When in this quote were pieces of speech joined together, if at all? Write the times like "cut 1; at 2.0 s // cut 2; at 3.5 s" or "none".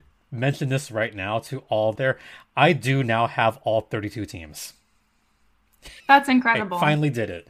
cut 1; at 2.0 s // cut 2; at 6.0 s